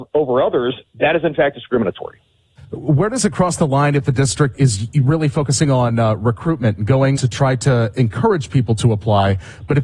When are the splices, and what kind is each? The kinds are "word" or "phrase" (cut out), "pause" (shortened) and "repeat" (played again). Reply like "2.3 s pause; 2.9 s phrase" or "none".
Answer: 7.1 s word